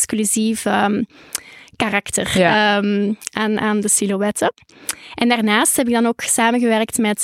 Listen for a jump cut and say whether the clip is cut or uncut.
uncut